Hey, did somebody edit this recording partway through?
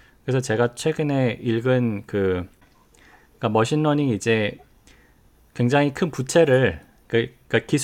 no; 0 cuts

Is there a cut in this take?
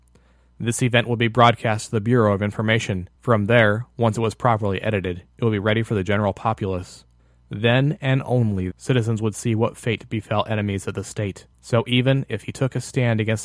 yes; 5 cuts; at 3.2 s, 5.3 s, 7.2 s, 8.7 s, 11.5 s

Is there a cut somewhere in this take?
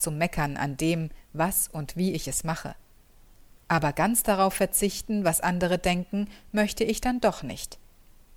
no; 0 cuts

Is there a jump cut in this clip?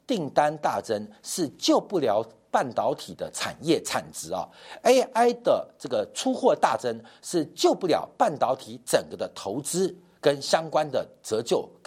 no; 0 cuts

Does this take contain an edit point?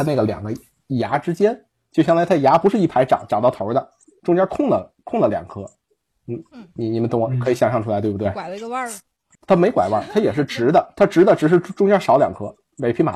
no; 0 cuts

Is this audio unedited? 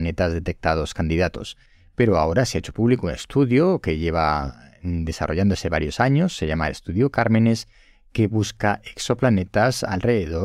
yes; 0 cuts

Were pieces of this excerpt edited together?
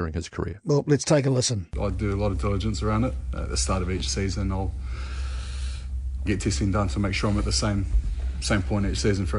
yes; 2 cuts; at 1.7 s, 6.3 s

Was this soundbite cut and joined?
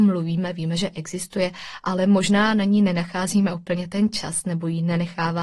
no; 0 cuts

